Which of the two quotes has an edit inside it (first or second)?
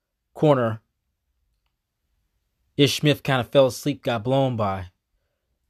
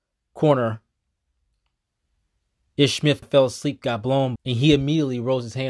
second